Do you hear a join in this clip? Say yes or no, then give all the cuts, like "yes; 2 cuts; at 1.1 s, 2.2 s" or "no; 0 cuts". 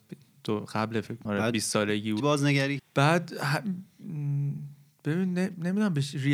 yes; 3 cuts; at 1.3 s, 2.2 s, 2.8 s